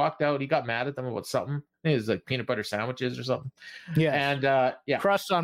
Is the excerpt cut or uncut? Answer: uncut